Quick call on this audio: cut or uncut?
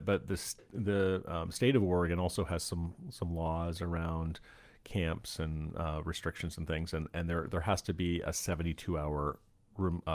uncut